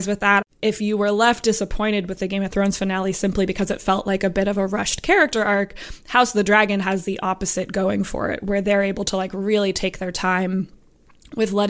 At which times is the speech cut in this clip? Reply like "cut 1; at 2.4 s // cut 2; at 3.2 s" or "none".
none